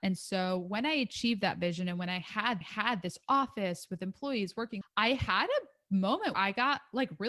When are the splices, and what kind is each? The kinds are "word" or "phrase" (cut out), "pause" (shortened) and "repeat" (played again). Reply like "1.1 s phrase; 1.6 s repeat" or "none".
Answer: 2.6 s repeat; 4.8 s word; 6.3 s word